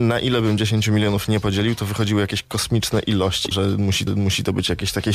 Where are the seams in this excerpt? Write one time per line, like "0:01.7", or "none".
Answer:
0:03.5
0:04.1